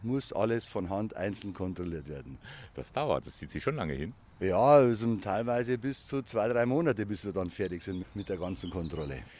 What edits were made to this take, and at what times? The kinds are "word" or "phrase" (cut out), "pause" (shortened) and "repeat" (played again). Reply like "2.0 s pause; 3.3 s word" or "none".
none